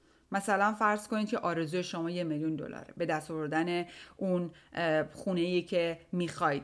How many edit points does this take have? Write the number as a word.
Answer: zero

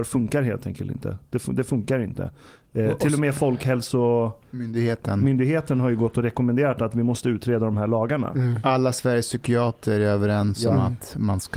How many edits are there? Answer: zero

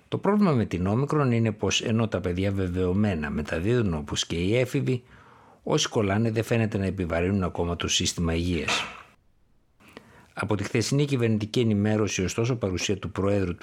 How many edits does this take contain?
zero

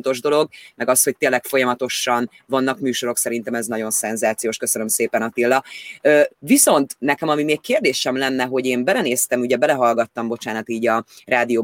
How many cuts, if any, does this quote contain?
one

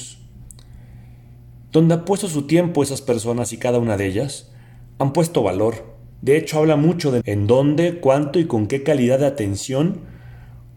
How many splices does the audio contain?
three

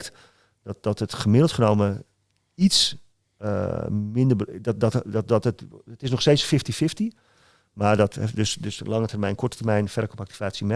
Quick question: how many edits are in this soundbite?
zero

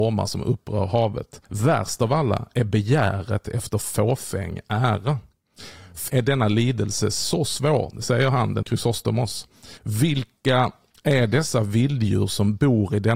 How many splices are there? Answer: four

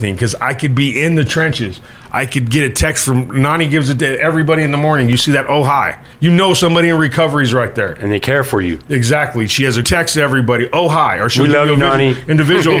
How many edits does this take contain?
two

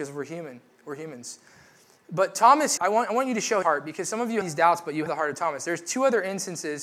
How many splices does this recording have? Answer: four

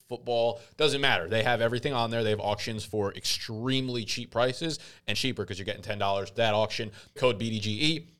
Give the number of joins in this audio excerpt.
three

